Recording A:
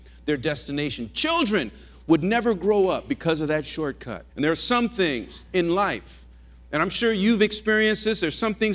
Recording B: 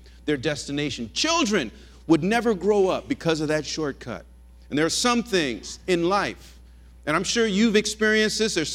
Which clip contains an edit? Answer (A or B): A